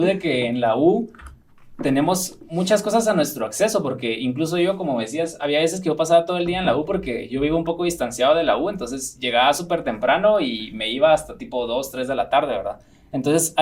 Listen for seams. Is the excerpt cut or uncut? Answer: uncut